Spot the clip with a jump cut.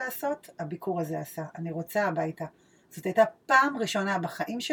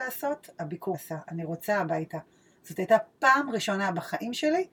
second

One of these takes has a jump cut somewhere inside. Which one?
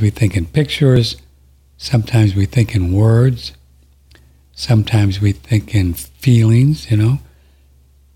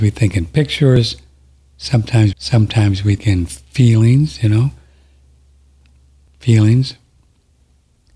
second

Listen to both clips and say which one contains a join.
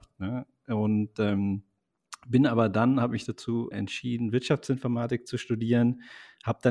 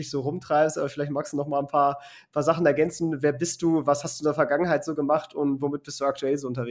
first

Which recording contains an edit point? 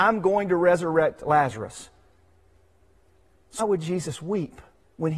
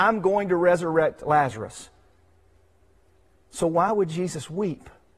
first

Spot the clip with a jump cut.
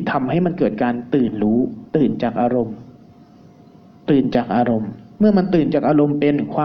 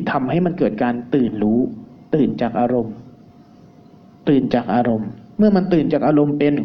first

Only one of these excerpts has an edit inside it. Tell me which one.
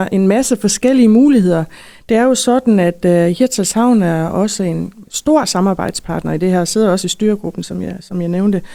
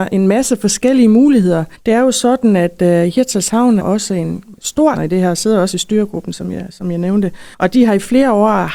second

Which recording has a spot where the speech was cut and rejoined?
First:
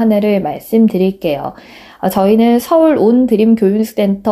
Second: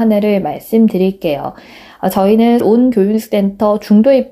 second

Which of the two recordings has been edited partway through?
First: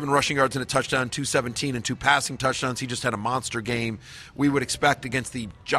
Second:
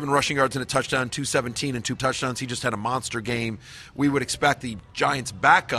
second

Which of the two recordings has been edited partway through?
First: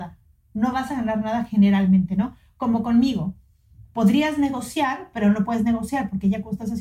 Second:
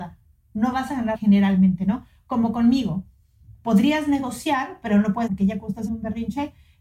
second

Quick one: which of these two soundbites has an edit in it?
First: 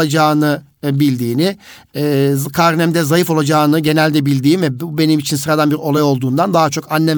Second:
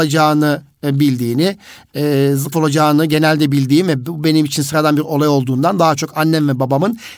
second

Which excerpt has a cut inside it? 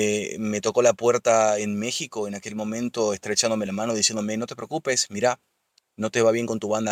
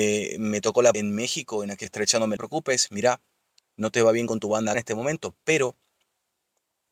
second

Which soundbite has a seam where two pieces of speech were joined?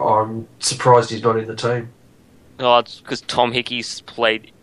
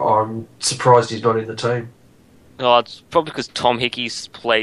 first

